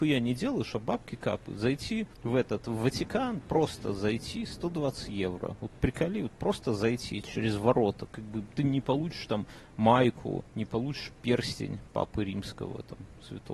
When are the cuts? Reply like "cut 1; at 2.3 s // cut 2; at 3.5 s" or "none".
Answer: cut 1; at 2.1 s // cut 2; at 10.5 s